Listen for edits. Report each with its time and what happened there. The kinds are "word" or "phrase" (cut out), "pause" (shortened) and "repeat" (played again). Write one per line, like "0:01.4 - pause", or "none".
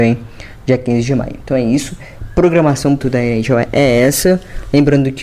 0:03.0 - word